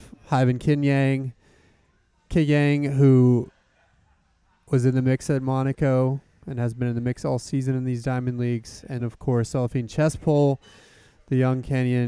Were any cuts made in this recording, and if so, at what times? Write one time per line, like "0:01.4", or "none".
0:09.0